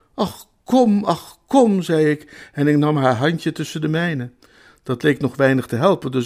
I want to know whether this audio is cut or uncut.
uncut